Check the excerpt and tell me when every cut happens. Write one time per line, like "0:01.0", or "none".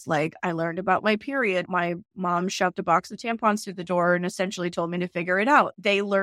0:01.7